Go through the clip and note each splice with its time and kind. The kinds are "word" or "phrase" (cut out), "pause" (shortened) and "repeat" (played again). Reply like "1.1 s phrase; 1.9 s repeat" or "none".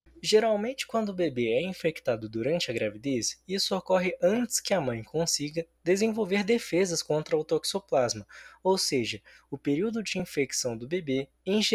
none